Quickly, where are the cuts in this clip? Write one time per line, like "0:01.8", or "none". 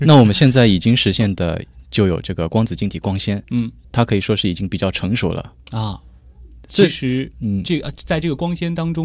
0:03.8